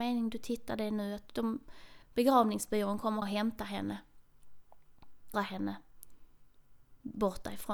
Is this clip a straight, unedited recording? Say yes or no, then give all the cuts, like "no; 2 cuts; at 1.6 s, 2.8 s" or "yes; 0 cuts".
no; 3 cuts; at 2.0 s, 3.2 s, 5.3 s